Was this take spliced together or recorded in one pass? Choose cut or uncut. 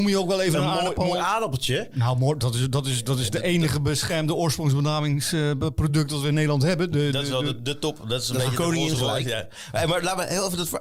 uncut